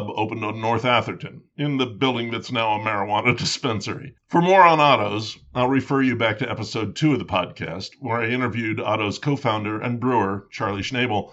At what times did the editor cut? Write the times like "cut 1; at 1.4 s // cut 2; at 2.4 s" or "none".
cut 1; at 4.2 s